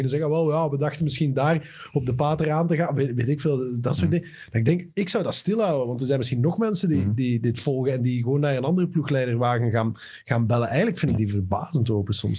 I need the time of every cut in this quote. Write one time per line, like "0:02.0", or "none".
none